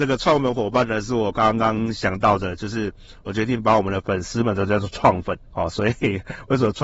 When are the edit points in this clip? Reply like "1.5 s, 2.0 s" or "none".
5.5 s